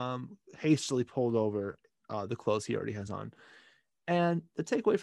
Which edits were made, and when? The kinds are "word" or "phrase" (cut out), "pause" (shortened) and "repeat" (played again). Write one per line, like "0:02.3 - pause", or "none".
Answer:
none

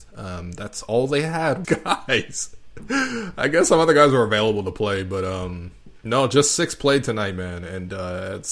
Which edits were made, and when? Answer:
0:01.6 - phrase

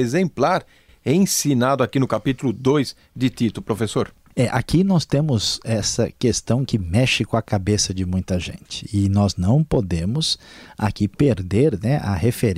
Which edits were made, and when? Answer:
none

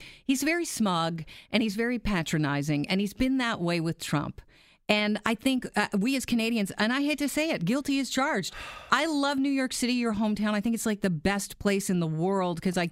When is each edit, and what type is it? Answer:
none

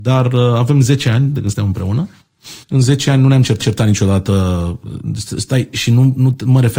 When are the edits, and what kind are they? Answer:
0:02.6 - pause
0:03.6 - repeat

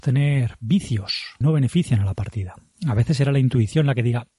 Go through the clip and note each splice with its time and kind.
0:01.4 - phrase

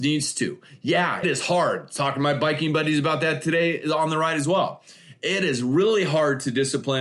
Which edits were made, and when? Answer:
0:01.2 - word

